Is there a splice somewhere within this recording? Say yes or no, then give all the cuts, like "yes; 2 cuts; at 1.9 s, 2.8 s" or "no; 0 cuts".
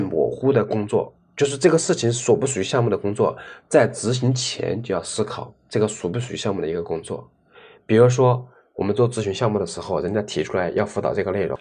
no; 0 cuts